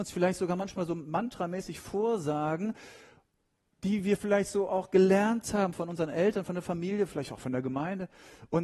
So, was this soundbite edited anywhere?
no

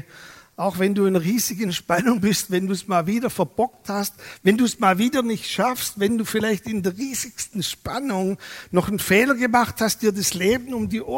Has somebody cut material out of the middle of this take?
no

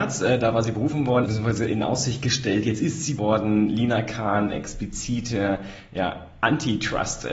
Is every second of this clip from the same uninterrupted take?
no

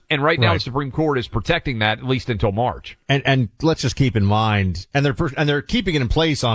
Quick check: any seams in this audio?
no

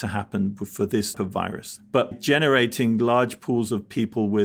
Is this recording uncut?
no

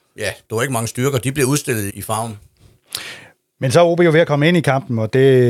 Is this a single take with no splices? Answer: no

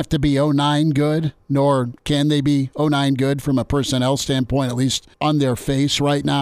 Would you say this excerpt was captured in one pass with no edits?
no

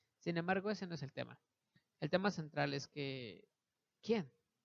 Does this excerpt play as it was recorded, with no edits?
yes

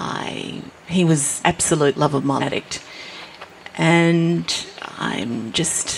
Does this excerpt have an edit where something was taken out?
yes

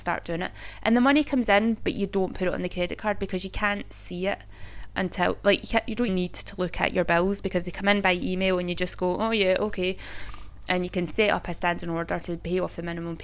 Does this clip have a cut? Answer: yes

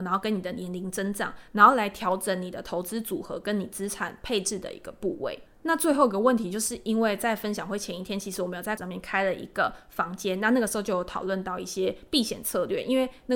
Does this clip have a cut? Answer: yes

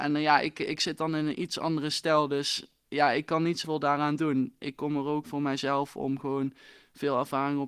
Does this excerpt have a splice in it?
yes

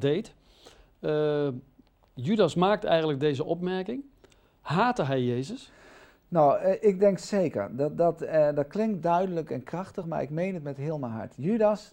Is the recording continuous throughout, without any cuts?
yes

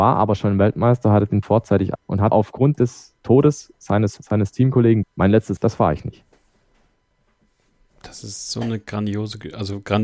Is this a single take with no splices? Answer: no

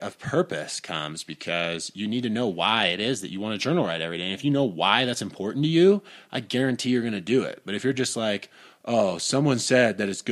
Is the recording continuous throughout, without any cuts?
yes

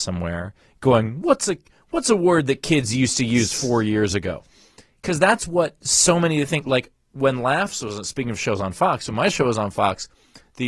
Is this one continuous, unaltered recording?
yes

